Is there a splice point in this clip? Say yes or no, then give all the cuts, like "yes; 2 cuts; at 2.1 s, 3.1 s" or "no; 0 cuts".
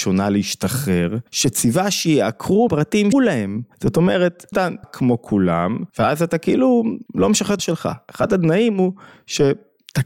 yes; 9 cuts; at 1.3 s, 2.7 s, 3.1 s, 3.7 s, 4.5 s, 4.8 s, 5.9 s, 7.1 s, 7.6 s